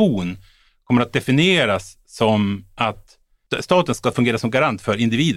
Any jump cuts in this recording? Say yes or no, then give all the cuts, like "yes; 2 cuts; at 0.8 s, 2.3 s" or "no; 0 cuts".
no; 0 cuts